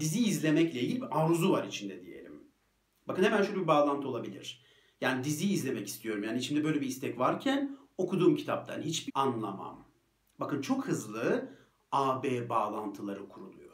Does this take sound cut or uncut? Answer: cut